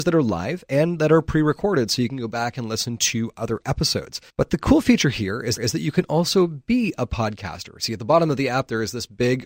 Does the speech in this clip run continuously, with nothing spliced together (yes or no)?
no